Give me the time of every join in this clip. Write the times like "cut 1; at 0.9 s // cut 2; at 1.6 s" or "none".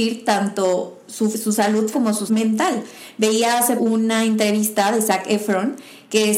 cut 1; at 1.3 s // cut 2; at 1.9 s // cut 3; at 2.3 s // cut 4; at 3.8 s